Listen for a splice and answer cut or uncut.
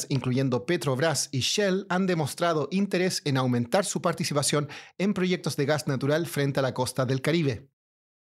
uncut